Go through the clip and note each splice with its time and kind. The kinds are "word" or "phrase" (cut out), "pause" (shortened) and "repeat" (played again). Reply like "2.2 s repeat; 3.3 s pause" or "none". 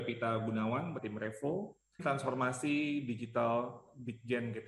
1.0 s word; 2.0 s word